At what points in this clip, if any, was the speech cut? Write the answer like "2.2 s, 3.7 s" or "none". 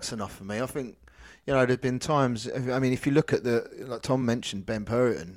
none